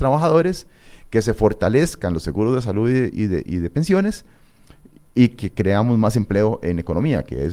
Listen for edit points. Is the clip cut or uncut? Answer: uncut